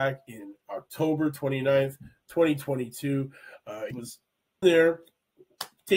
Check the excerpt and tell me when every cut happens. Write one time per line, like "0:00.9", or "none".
0:03.9
0:04.6